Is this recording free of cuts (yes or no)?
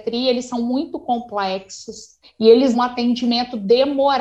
no